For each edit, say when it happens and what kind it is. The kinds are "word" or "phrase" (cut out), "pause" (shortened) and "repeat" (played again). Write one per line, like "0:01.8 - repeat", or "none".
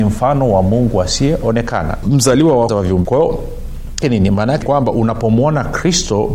0:02.0 - word
0:02.7 - word
0:03.0 - word
0:04.0 - word
0:04.6 - word